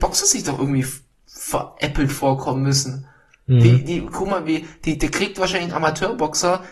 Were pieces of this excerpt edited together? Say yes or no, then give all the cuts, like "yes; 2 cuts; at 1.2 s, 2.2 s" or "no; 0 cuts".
no; 0 cuts